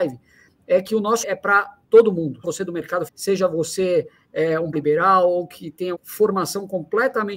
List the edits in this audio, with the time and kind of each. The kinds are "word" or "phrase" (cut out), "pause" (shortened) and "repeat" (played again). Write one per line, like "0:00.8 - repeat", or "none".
0:01.2 - word
0:02.4 - word
0:03.1 - word
0:04.7 - word
0:05.9 - word